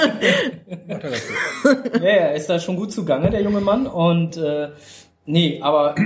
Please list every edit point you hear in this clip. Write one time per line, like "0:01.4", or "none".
none